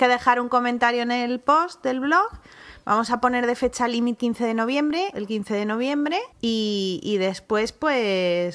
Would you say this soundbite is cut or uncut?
cut